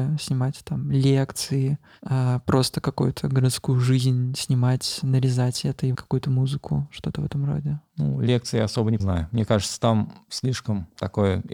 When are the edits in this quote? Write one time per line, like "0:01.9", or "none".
0:05.9
0:09.0